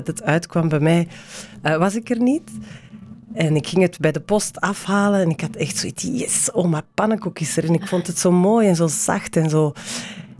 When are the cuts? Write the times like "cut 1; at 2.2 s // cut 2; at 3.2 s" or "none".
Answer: none